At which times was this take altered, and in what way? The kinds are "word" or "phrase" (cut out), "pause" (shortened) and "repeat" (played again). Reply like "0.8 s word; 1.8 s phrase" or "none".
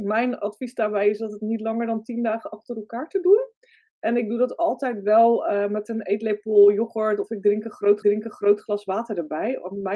8.0 s repeat